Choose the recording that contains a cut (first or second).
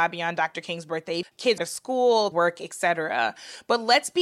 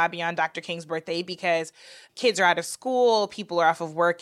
first